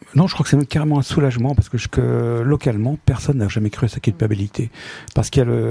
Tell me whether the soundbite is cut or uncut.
cut